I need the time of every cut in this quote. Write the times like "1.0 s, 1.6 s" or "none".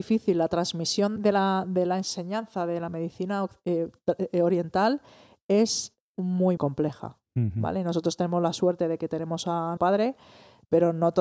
1.2 s, 6.6 s, 9.8 s